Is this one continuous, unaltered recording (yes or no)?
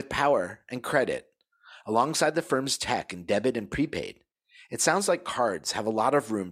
yes